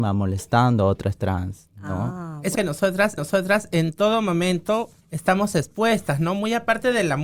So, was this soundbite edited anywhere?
yes; 4 cuts; at 1.2 s, 2.5 s, 3.2 s, 5.0 s

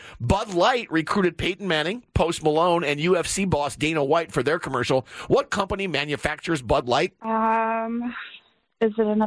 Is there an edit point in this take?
yes; 1 cut; at 7.2 s

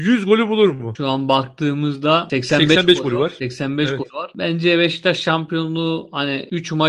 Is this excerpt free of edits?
yes; 0 cuts

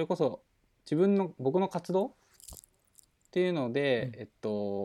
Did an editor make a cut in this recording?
no; 0 cuts

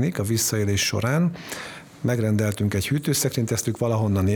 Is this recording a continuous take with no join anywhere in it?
yes; 0 cuts

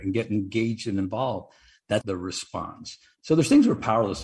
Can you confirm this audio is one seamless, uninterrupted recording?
no; 1 cut; at 2.0 s

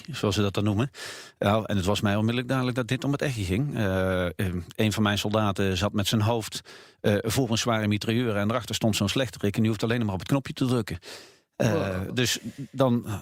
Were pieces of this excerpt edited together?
no; 0 cuts

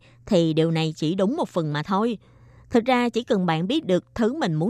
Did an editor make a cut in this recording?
no; 0 cuts

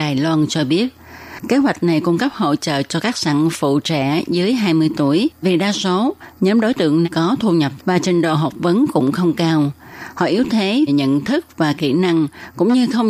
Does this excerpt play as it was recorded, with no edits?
no; 4 cuts; at 5.4 s, 7.0 s, 7.8 s, 10.9 s

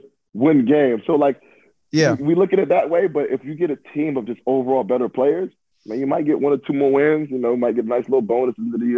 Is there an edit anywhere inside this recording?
no; 0 cuts

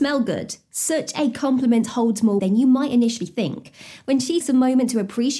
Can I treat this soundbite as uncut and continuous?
no; 2 cuts; at 2.4 s, 4.4 s

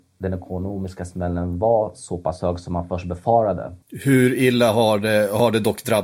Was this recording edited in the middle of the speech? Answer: yes; 1 cut; at 3.8 s

